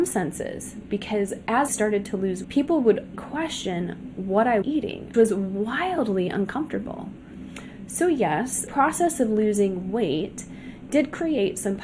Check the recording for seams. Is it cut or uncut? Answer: cut